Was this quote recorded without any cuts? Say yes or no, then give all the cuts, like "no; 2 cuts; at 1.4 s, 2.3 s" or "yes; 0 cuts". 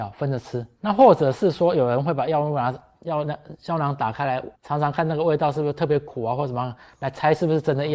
no; 1 cut; at 4.6 s